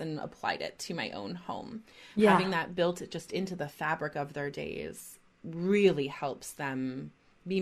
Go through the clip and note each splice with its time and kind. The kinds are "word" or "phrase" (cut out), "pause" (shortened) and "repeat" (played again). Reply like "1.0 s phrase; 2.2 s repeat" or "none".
none

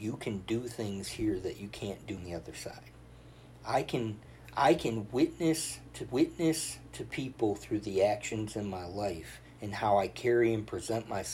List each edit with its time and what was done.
2.2 s word; 6.1 s repeat

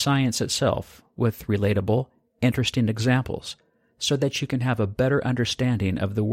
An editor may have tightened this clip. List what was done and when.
none

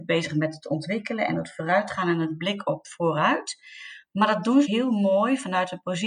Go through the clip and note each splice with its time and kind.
4.6 s word

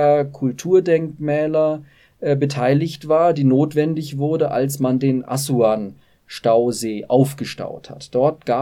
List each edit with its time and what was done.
none

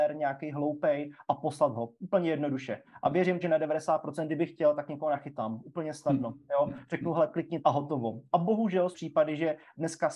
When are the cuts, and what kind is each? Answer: 3.4 s word; 7.6 s word; 8.9 s word

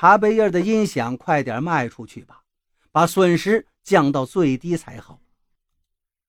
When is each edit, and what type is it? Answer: none

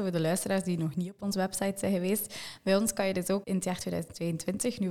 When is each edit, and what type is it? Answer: 3.4 s word

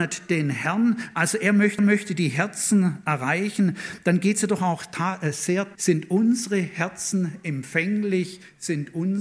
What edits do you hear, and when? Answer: 1.8 s repeat; 5.7 s word

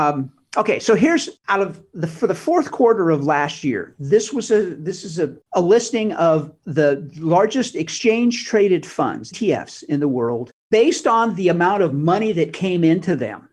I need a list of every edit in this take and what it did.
1.4 s pause; 5.5 s pause; 9.3 s word

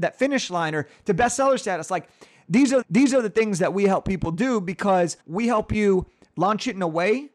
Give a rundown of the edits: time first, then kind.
2.8 s repeat; 5.2 s pause

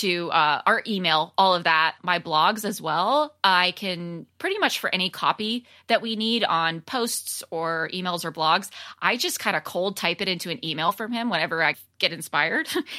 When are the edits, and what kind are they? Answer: none

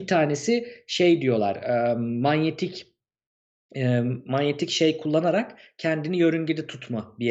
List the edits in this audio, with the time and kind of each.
none

